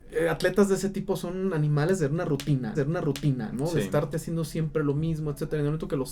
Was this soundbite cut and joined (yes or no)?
yes